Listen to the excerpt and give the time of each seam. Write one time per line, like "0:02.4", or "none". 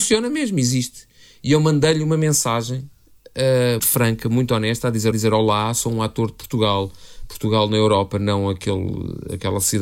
0:03.8
0:05.1